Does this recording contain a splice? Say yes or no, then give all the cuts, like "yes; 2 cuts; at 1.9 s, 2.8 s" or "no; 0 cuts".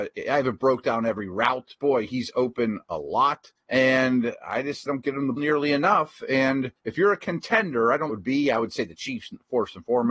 yes; 6 cuts; at 1.8 s, 3.6 s, 4.9 s, 5.4 s, 6.8 s, 8.1 s